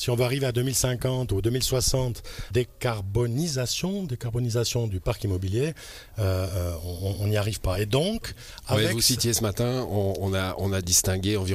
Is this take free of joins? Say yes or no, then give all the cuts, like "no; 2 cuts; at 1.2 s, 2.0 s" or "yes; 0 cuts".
no; 1 cut; at 2.5 s